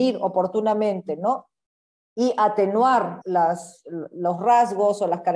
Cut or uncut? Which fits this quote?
cut